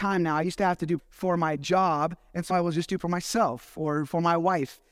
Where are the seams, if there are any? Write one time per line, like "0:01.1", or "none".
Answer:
0:01.0
0:02.5
0:03.0